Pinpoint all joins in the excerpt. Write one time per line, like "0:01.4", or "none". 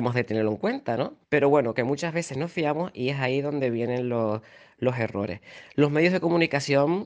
0:01.2